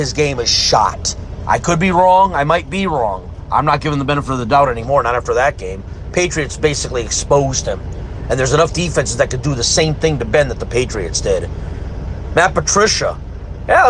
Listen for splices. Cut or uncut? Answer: uncut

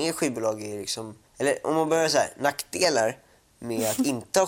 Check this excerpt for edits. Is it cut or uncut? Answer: cut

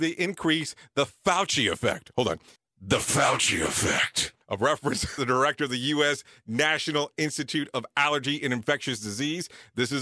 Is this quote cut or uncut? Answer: cut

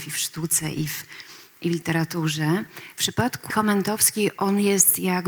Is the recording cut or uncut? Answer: cut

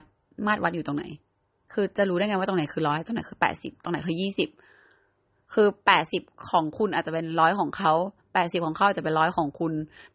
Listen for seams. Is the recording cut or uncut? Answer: uncut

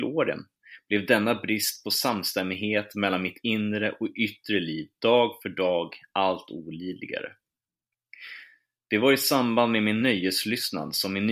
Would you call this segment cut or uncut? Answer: uncut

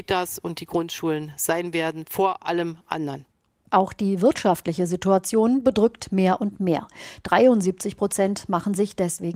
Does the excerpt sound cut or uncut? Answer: uncut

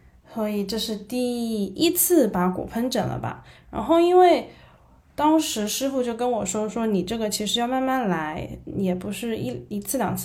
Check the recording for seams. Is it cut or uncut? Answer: uncut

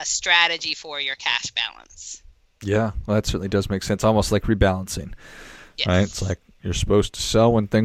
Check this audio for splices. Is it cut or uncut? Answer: uncut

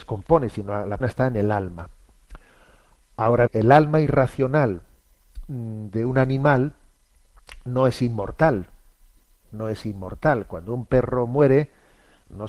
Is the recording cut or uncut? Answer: cut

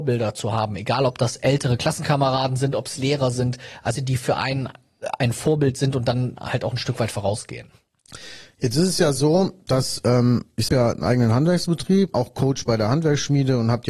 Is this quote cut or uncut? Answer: cut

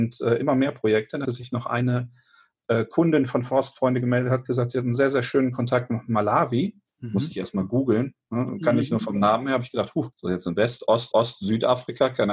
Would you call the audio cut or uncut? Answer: cut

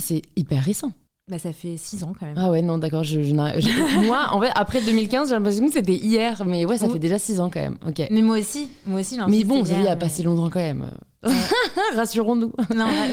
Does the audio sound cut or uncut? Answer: cut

